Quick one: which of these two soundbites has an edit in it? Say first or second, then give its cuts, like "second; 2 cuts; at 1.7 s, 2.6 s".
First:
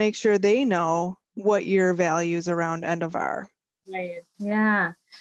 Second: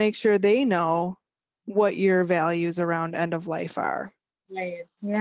first; 2 cuts; at 1.2 s, 3.1 s